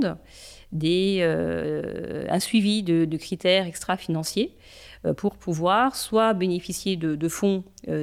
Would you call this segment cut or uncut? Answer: uncut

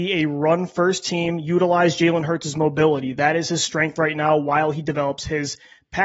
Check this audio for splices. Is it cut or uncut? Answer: uncut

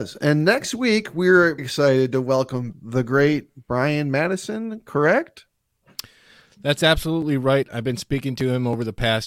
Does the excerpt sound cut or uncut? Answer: cut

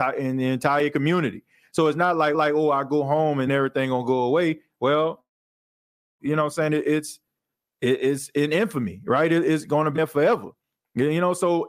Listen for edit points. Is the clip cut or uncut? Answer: cut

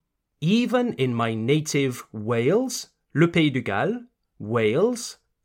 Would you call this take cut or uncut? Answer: uncut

